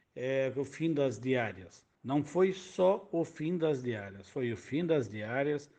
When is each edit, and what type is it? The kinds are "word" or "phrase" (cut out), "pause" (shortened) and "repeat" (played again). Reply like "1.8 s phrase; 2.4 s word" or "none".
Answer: 1.9 s pause